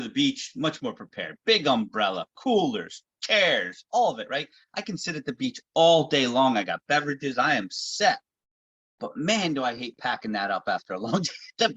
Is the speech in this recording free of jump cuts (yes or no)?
yes